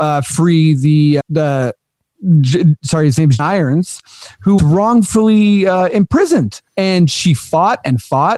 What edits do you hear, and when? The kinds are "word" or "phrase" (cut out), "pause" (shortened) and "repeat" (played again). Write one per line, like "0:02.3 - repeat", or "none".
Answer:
0:01.2 - word
0:03.4 - word
0:04.6 - word
0:06.7 - pause